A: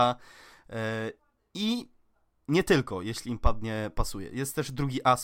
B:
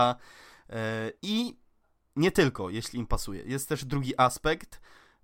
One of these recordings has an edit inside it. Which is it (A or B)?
B